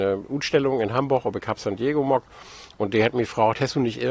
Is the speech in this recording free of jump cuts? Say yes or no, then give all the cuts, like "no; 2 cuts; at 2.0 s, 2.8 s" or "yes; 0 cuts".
yes; 0 cuts